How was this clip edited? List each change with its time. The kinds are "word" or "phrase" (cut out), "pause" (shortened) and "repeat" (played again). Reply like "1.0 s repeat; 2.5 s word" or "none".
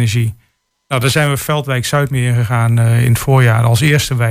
none